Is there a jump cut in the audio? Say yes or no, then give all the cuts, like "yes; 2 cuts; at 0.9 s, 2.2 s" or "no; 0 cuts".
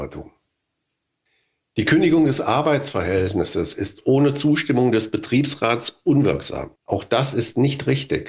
yes; 1 cut; at 6.8 s